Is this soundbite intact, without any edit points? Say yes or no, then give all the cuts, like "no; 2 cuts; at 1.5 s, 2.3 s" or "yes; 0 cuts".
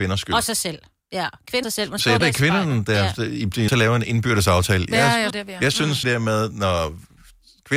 no; 5 cuts; at 1.6 s, 2.2 s, 3.7 s, 5.3 s, 6.0 s